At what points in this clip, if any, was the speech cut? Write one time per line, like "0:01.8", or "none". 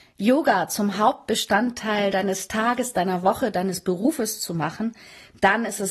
none